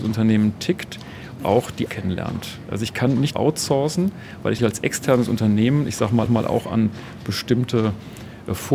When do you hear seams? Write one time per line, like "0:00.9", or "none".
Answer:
0:01.4
0:01.9
0:03.3
0:04.6
0:06.3